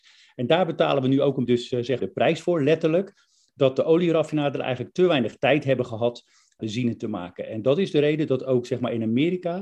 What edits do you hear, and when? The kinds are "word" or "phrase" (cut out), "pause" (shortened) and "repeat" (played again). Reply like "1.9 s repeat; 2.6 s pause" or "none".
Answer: 1.5 s word; 2.0 s word; 6.6 s word